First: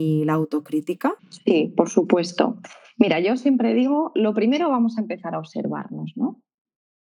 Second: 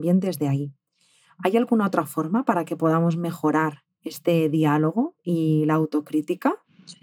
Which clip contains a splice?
first; 1 cut; at 1.2 s

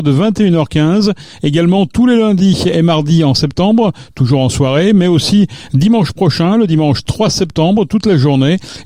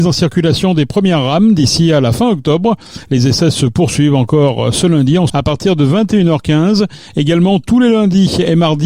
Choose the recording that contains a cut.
second; 1 cut; at 5.3 s

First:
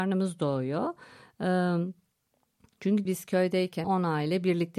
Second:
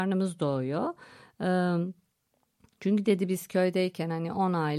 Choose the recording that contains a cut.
first; 2 cuts; at 3.1 s, 3.8 s

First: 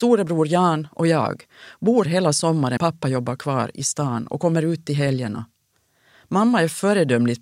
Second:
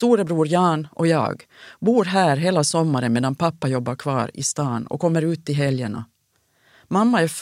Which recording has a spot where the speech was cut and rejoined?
first; 2 cuts; at 2.0 s, 2.8 s

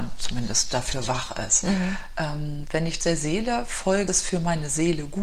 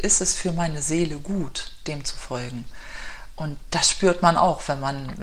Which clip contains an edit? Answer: first; 2 cuts; at 3.0 s, 4.1 s

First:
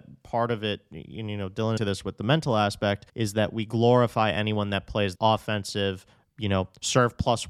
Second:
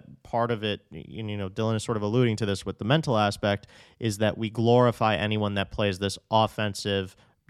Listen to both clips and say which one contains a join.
first; 3 cuts; at 1.8 s, 3.1 s, 5.1 s

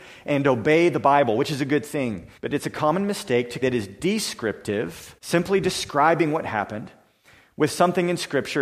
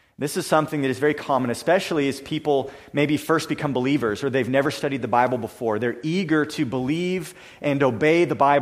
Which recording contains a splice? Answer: first; 3 cuts; at 2.4 s, 3.6 s, 5.2 s

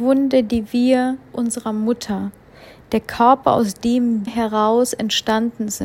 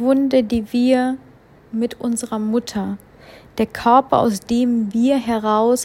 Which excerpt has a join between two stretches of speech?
first; 2 cuts; at 1.3 s, 4.3 s

